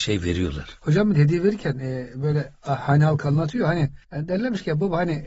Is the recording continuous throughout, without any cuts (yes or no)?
no